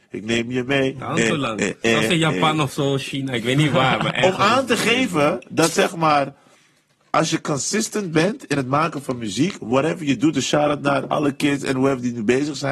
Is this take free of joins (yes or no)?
yes